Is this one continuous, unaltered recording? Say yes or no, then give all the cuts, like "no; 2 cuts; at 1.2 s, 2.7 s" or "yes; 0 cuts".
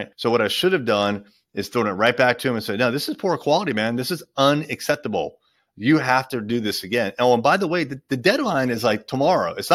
yes; 0 cuts